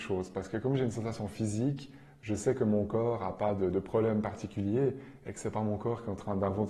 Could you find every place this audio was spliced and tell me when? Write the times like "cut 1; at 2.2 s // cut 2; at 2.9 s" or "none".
none